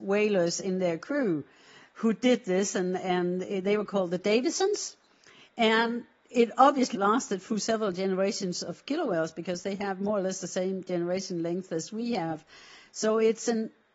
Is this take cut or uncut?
cut